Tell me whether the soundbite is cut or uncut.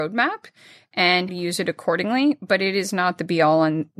cut